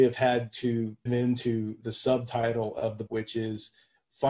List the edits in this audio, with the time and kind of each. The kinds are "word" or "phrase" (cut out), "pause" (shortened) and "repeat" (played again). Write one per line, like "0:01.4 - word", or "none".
0:01.1 - word
0:01.8 - word
0:03.1 - word

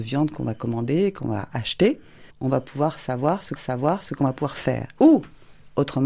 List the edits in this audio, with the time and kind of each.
0:02.3 - pause
0:03.6 - repeat

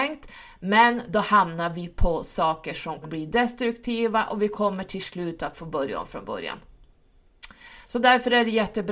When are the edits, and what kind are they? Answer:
0:03.0 - word

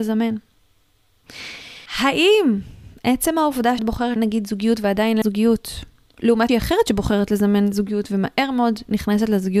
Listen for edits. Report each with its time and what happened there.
0:01.9 - pause
0:03.8 - word
0:04.2 - word
0:05.2 - word
0:06.5 - word

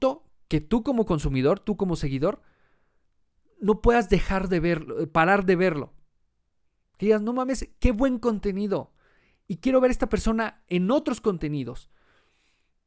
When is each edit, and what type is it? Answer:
none

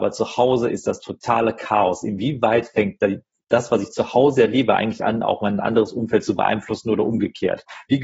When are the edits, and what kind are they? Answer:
none

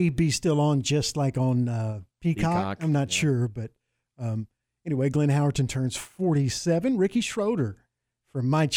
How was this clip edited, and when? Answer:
0:02.1 - pause

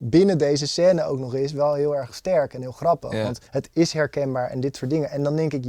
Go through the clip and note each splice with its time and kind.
0:03.5 - pause

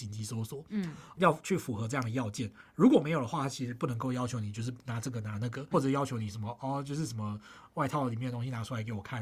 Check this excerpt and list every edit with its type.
0:01.1 - word
0:05.7 - word

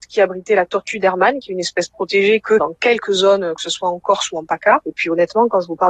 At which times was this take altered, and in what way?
0:02.4 - phrase

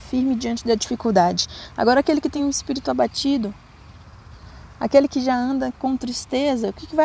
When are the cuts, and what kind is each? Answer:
none

